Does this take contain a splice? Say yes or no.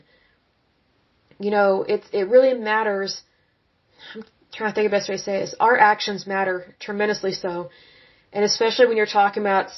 no